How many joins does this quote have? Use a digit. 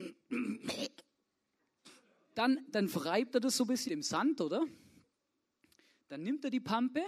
3